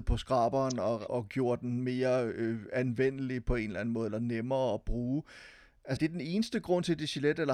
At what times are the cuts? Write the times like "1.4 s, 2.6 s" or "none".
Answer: 1.1 s, 6.0 s